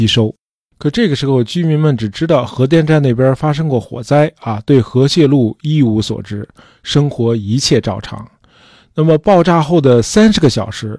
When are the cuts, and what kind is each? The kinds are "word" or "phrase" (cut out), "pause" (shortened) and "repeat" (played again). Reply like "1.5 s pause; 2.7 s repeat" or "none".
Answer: none